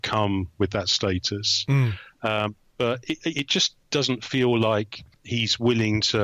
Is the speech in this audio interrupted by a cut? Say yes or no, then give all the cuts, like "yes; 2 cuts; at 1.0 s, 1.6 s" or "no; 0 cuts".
yes; 2 cuts; at 3.8 s, 5.1 s